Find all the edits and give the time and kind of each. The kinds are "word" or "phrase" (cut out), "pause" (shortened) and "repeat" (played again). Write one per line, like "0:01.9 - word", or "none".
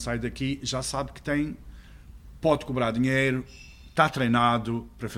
none